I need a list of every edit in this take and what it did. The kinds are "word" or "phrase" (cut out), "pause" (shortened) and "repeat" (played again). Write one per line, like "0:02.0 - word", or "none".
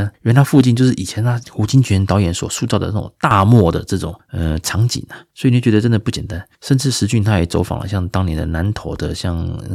0:05.3 - pause
0:06.5 - pause